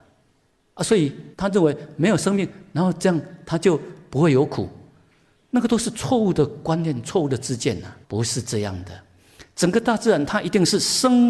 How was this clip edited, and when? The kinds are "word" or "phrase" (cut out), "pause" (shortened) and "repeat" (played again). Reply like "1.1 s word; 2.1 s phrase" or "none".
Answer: 1.3 s pause; 8.0 s pause